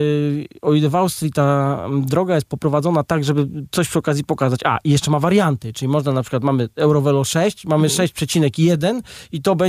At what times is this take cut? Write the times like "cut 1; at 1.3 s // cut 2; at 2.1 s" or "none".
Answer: none